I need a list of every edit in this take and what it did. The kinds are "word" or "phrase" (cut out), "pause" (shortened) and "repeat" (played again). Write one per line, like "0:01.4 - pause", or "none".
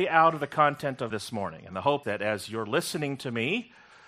0:01.1 - phrase
0:02.0 - word